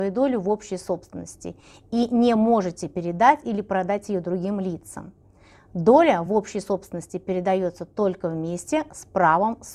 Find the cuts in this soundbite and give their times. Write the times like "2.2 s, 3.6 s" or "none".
none